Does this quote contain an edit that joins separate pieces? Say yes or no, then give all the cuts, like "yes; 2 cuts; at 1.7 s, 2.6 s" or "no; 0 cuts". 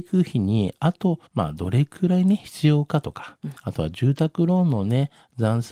yes; 2 cuts; at 1.3 s, 3.6 s